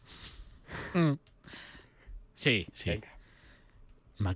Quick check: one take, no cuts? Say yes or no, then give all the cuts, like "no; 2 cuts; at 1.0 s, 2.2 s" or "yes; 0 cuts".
no; 1 cut; at 2.7 s